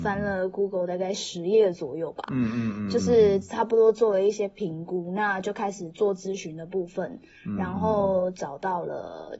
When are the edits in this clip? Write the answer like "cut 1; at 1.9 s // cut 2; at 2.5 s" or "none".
none

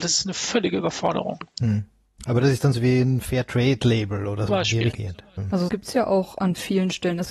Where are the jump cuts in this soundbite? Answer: cut 1; at 1.5 s // cut 2; at 2.7 s // cut 3; at 4.5 s // cut 4; at 4.9 s // cut 5; at 5.7 s

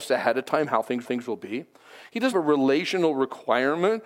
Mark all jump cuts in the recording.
cut 1; at 1.0 s // cut 2; at 2.3 s

